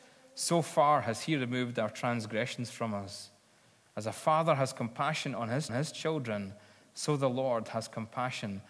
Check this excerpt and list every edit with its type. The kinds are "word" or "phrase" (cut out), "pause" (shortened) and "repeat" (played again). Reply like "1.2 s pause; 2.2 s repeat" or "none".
5.7 s repeat

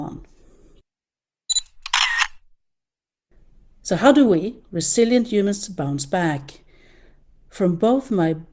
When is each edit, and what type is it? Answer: none

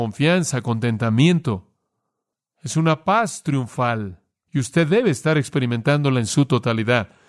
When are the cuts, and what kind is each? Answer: none

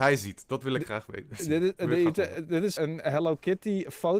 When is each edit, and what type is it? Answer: 2.8 s word

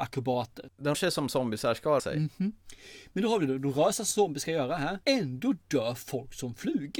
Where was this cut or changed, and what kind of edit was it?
0.9 s word; 2.0 s word; 5.0 s pause

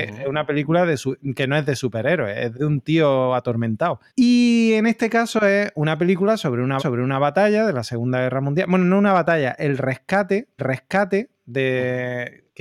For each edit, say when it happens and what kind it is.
2.5 s word; 4.1 s pause; 6.8 s repeat; 10.6 s repeat

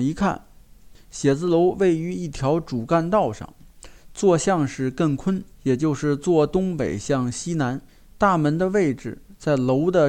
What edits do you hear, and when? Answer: 5.5 s pause; 7.9 s pause

